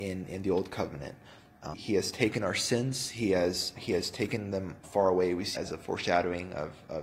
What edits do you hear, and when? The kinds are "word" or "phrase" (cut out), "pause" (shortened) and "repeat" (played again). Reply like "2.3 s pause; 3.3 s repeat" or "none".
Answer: 1.7 s word; 3.7 s word; 4.8 s word; 5.5 s word